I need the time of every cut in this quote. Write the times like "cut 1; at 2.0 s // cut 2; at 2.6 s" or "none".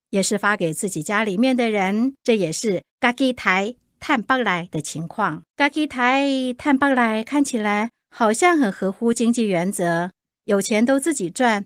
cut 1; at 2.2 s // cut 2; at 2.9 s // cut 3; at 5.5 s